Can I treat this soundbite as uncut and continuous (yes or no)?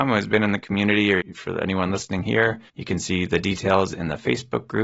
no